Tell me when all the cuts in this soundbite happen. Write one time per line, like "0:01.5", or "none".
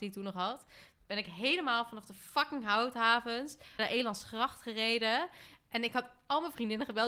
0:03.8